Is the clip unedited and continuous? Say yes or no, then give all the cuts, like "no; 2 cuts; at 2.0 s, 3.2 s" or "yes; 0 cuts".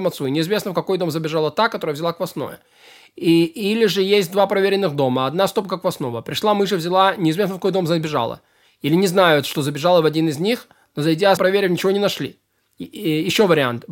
no; 1 cut; at 11.4 s